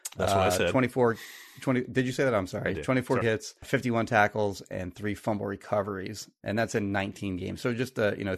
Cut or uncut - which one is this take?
cut